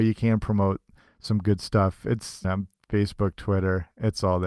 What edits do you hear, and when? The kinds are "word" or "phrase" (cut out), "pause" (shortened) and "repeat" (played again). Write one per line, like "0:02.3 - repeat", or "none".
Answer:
0:02.4 - word

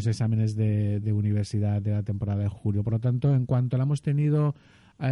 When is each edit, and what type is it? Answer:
0:01.0 - word
0:02.5 - word

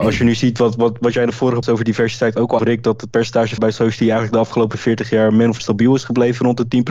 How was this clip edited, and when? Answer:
0:01.6 - word
0:02.6 - word
0:03.6 - word
0:05.6 - word

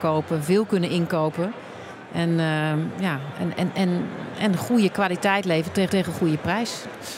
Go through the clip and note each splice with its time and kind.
0:05.9 - repeat

